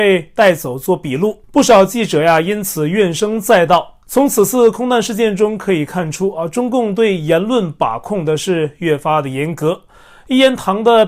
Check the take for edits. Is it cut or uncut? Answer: cut